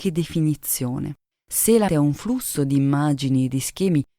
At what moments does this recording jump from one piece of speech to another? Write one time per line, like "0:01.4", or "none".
0:01.3
0:01.9